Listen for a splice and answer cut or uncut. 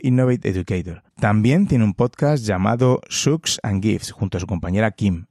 cut